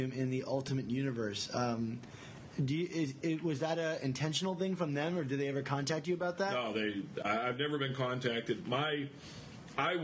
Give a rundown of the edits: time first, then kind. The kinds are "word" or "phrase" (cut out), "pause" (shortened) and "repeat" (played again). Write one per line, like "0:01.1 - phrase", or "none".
none